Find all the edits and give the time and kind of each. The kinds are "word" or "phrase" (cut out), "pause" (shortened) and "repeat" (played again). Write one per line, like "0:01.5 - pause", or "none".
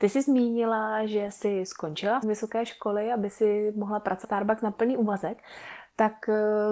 0:02.2 - word
0:04.2 - word